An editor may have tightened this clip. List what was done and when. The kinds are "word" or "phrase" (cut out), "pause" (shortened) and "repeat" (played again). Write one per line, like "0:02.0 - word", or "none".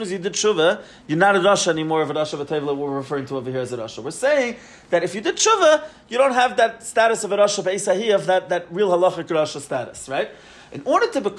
none